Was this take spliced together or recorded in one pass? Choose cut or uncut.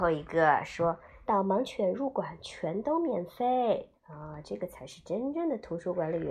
cut